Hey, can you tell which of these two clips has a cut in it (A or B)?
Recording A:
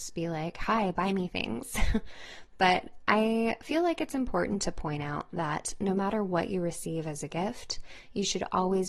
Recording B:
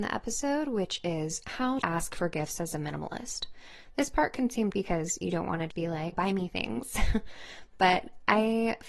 B